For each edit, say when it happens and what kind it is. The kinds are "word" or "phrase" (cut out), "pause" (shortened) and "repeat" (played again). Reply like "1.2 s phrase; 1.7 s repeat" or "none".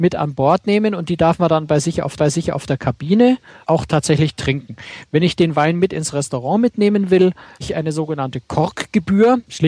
2.2 s repeat; 7.6 s word